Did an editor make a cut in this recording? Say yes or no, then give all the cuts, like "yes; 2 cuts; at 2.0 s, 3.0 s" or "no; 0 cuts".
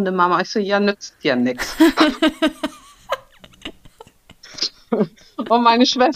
no; 0 cuts